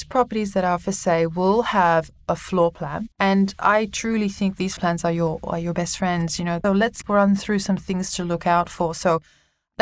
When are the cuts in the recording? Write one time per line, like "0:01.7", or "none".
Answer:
0:03.1
0:04.8
0:06.6

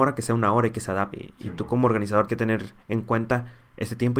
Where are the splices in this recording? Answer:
0:01.1
0:02.3

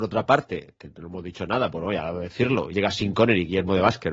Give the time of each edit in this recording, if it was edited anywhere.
0:02.7

